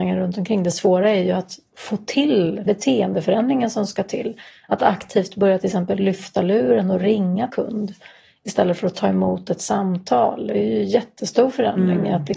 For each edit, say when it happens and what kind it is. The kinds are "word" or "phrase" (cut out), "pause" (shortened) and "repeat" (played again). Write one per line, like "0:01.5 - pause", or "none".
0:01.7 - pause
0:02.7 - word
0:07.5 - word

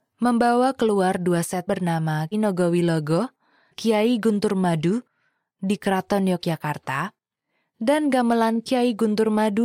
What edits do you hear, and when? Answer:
0:01.7 - word
0:02.3 - word
0:03.7 - word

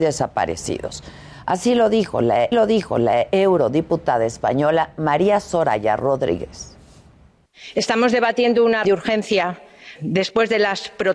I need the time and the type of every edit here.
0:02.5 - repeat
0:08.8 - word
0:10.0 - word

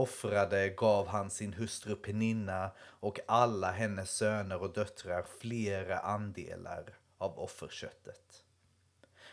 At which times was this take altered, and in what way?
none

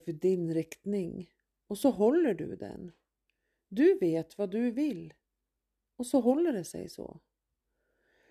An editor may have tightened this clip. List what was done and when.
none

